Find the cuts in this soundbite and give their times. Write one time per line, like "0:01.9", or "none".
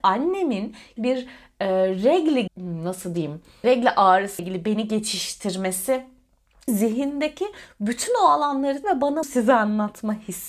0:01.0
0:02.5
0:03.6
0:04.4
0:06.7
0:08.8
0:09.2